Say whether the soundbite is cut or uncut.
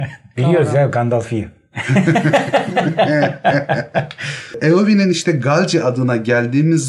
uncut